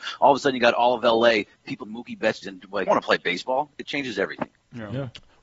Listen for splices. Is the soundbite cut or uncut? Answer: cut